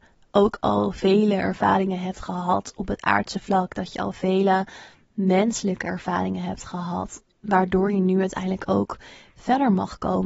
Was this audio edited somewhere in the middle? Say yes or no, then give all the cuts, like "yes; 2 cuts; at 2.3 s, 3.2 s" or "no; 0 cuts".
no; 0 cuts